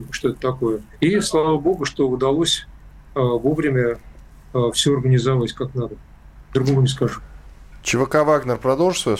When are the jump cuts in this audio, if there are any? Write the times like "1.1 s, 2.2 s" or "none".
0.9 s